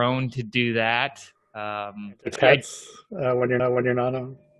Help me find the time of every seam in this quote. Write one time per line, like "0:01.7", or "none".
0:01.4
0:02.4
0:03.6